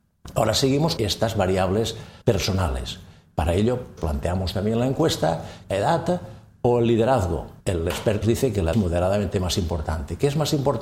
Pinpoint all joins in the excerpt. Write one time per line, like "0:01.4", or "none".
0:01.0
0:02.2
0:04.0
0:05.7
0:07.6
0:08.2
0:08.7